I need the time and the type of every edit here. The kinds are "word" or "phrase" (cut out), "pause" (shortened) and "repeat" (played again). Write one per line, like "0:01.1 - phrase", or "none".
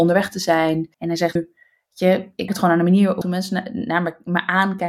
0:00.9 - pause
0:01.4 - word
0:02.5 - word
0:03.2 - phrase

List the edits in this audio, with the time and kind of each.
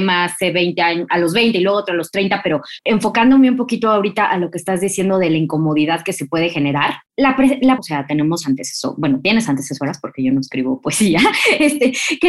0:02.8 - word
0:07.8 - phrase

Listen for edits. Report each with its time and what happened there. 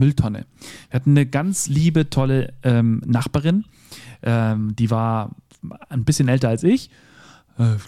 none

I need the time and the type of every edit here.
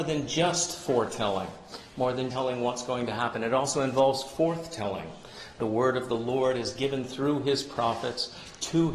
0:02.3 - word

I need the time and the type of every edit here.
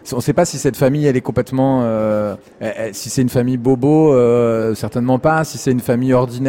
none

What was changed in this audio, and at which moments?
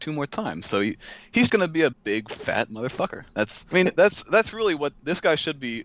0:01.5 - word
0:01.9 - word
0:03.7 - word

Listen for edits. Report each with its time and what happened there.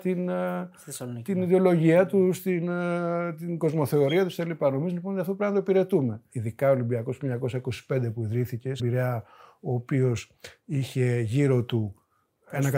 0:08.8 - word

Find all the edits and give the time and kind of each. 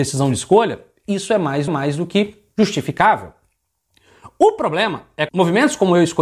0:01.7 - repeat
0:05.3 - word

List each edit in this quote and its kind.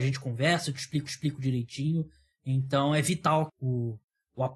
0:01.1 - repeat
0:03.5 - word

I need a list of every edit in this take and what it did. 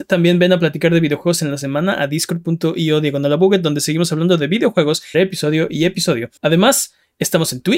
0:05.1 - word
0:06.4 - pause

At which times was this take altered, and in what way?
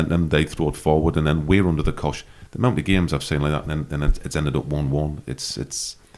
none

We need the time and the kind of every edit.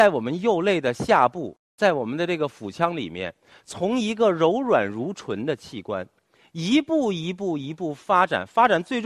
none

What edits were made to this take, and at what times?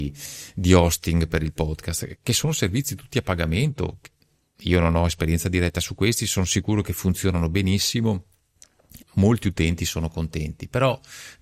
0:09.0 - word

